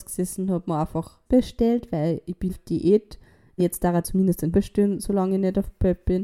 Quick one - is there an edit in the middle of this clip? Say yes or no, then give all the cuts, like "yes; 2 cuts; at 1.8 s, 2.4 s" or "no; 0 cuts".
yes; 5 cuts; at 1.3 s, 2.5 s, 3.6 s, 4.0 s, 4.5 s